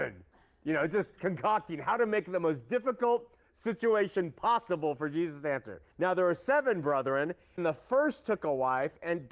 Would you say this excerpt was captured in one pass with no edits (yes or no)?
no